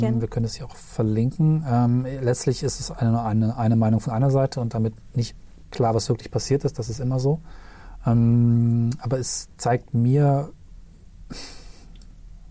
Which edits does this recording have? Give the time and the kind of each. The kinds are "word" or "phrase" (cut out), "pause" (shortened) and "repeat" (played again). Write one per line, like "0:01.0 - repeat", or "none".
none